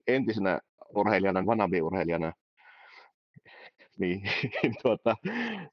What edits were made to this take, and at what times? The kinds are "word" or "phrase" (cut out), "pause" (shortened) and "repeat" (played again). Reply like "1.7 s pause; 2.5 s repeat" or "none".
1.0 s word; 1.4 s word; 4.8 s word